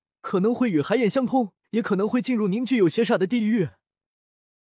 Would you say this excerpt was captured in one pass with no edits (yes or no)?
no